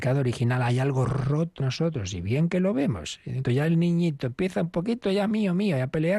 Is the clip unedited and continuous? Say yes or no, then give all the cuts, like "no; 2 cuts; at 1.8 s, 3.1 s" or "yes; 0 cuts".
no; 2 cuts; at 1.6 s, 3.4 s